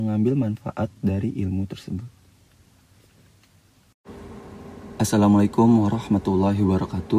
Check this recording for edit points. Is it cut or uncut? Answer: uncut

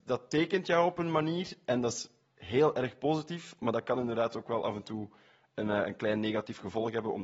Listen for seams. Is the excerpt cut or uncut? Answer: uncut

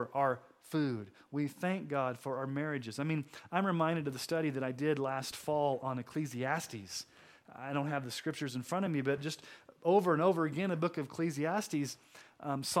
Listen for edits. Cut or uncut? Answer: uncut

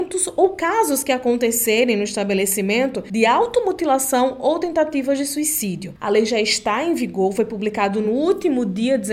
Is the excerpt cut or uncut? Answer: uncut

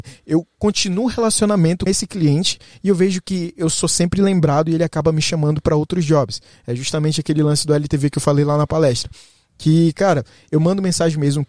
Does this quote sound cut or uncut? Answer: cut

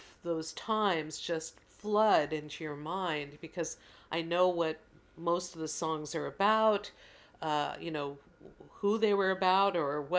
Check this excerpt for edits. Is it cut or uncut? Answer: uncut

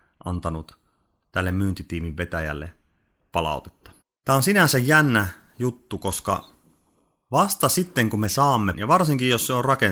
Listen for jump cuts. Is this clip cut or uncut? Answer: cut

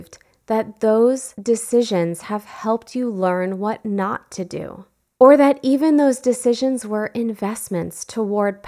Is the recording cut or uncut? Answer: uncut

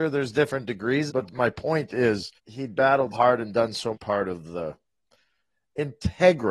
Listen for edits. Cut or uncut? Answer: cut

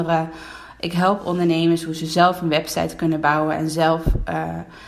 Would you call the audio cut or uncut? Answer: uncut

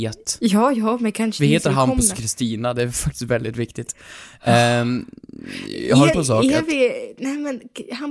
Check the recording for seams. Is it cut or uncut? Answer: cut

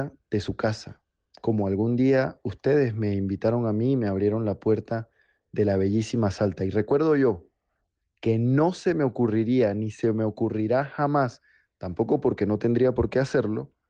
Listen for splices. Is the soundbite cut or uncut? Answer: uncut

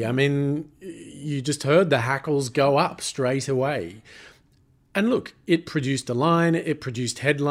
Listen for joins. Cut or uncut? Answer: uncut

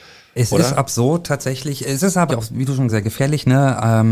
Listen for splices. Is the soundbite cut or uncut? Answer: cut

